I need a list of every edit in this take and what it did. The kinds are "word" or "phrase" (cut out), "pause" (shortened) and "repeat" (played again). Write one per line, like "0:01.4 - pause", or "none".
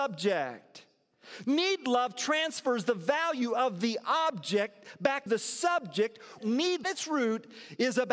0:05.3 - word
0:06.4 - phrase
0:06.8 - phrase